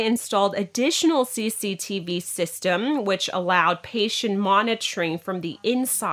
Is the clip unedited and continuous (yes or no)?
yes